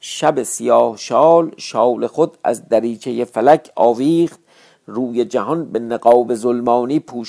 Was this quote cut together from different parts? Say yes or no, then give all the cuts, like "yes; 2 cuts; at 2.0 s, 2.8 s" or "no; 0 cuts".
no; 0 cuts